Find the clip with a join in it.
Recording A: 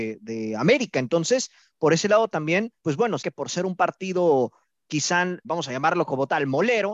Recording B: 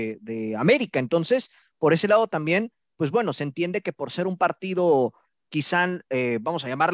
A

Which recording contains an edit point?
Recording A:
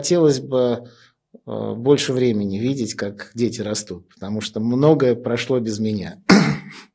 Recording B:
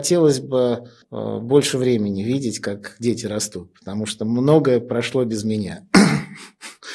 B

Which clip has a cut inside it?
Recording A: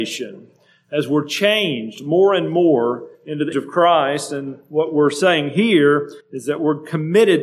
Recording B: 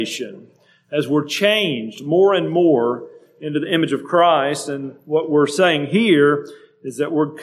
A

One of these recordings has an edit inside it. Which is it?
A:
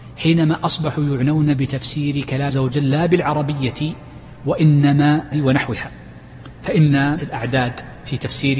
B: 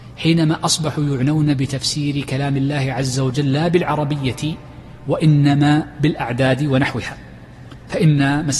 A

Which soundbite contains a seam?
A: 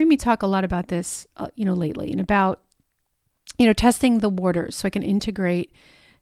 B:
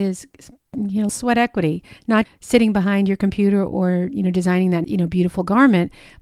B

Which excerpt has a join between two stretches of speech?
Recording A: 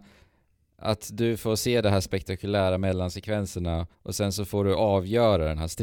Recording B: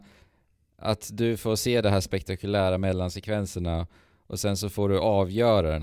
A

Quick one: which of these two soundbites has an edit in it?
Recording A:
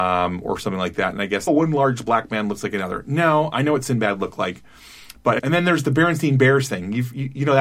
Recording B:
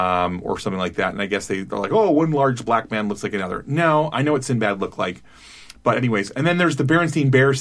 A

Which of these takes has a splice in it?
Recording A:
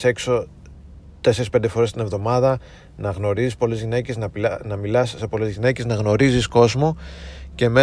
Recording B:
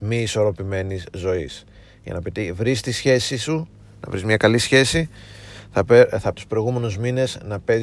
B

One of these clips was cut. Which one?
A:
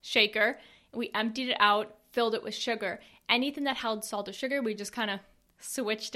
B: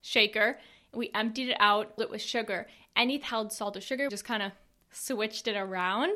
B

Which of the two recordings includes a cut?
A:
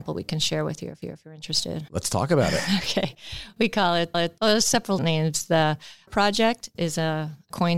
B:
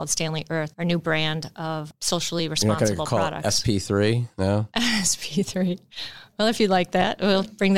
A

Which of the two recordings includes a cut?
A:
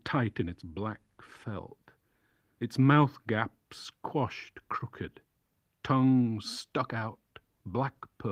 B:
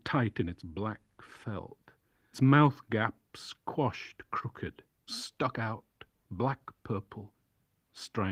B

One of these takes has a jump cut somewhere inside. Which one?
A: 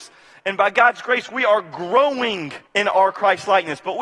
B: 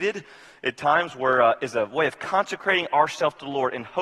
A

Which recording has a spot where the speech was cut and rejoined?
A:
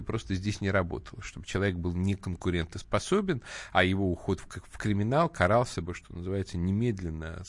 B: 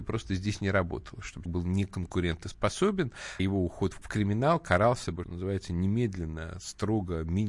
B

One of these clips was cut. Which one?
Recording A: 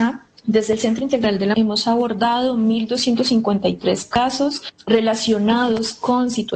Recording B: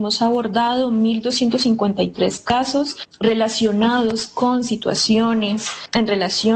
A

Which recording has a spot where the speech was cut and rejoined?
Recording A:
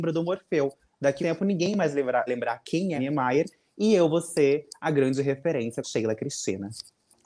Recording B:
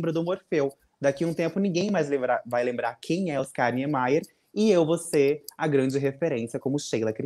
A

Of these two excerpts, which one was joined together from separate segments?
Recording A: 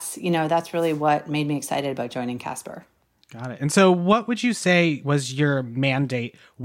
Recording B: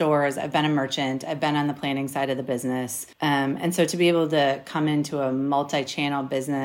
B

